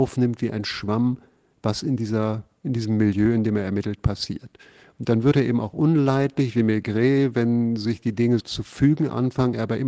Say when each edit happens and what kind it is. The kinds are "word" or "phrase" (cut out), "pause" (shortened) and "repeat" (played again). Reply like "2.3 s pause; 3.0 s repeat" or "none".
8.4 s word